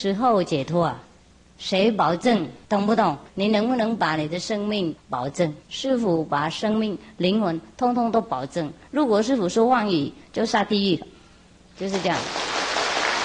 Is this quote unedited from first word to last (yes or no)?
no